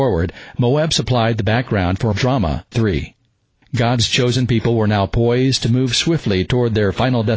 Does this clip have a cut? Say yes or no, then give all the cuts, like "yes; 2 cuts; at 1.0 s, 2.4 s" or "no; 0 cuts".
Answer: yes; 2 cuts; at 2.1 s, 2.7 s